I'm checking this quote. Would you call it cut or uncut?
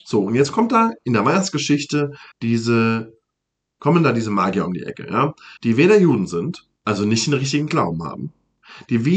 cut